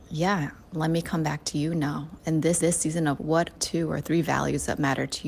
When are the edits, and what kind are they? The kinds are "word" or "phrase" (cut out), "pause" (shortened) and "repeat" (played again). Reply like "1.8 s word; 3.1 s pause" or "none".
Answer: 2.6 s repeat; 3.2 s word; 3.6 s phrase